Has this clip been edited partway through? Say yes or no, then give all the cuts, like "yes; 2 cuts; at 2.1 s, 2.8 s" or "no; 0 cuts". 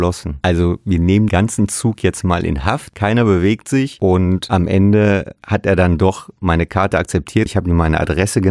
yes; 2 cuts; at 1.3 s, 7.5 s